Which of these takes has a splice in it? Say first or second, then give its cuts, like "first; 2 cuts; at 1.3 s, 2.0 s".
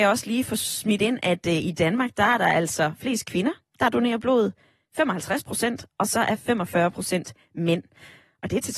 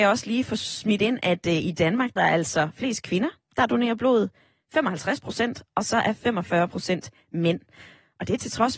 second; 1 cut; at 2.2 s